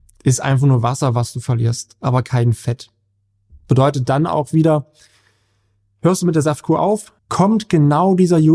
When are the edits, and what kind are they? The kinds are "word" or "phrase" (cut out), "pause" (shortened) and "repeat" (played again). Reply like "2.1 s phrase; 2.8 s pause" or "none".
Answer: 7.2 s pause